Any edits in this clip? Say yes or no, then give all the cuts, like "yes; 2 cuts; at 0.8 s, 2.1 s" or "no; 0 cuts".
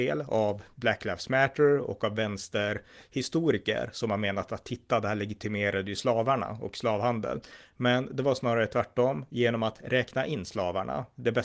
no; 0 cuts